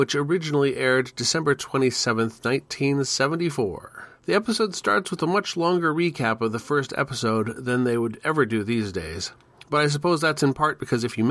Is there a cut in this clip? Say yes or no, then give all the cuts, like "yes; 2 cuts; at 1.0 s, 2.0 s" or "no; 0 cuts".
yes; 1 cut; at 4.2 s